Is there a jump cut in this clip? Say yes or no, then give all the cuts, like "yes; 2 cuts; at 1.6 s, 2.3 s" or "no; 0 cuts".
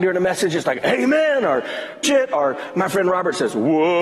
yes; 1 cut; at 2.0 s